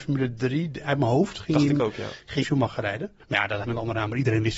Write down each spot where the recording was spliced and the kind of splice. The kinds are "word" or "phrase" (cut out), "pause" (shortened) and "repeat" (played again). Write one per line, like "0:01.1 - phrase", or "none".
0:02.4 - phrase
0:03.2 - pause
0:03.6 - word